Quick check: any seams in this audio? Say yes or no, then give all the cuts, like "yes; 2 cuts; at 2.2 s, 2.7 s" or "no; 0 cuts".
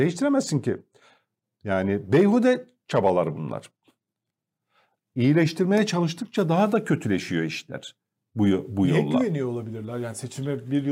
no; 0 cuts